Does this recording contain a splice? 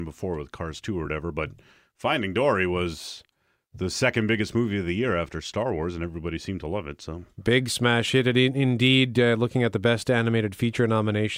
no; 0 cuts

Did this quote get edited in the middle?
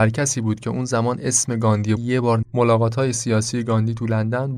yes; 2 cuts; at 2.0 s, 2.4 s

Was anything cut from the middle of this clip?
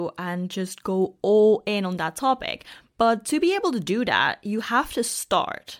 no; 0 cuts

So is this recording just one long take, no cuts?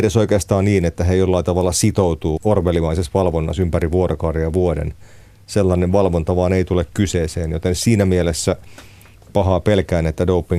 no; 1 cut; at 2.4 s

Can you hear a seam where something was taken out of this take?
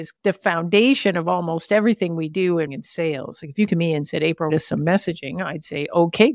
yes; 3 cuts; at 2.7 s, 3.7 s, 4.5 s

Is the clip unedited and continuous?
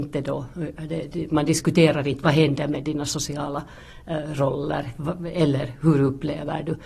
yes; 0 cuts

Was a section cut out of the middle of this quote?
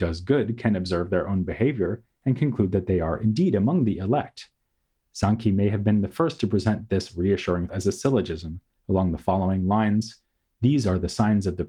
yes; 1 cut; at 7.7 s

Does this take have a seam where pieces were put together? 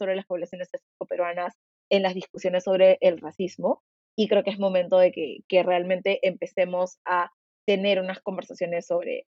no; 0 cuts

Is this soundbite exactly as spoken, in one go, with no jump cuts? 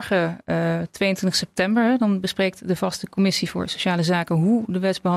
yes; 0 cuts

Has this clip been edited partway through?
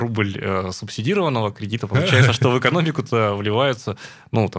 no; 0 cuts

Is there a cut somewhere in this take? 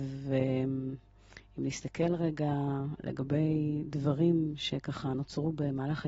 no; 0 cuts

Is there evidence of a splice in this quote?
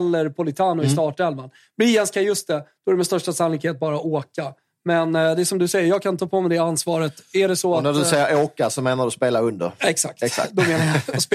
no; 0 cuts

